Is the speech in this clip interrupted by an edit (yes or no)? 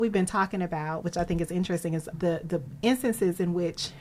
yes